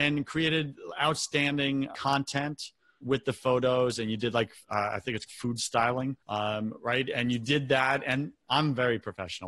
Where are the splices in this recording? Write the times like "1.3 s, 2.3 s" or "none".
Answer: 1.9 s, 3.0 s, 4.6 s, 5.3 s, 6.2 s